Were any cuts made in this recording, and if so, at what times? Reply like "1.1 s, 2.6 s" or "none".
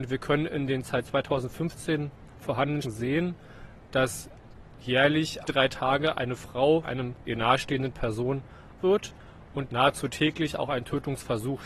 2.8 s, 5.5 s, 6.8 s, 7.3 s, 8.8 s, 9.7 s